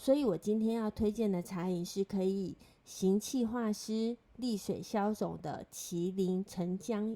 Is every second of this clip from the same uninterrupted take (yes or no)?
yes